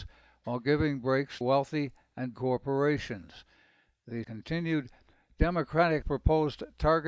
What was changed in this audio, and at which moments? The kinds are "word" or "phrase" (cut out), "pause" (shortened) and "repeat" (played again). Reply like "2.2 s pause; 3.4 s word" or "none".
1.4 s word; 2.3 s word; 4.2 s word; 6.0 s word